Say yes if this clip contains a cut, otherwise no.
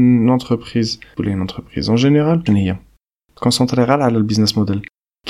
yes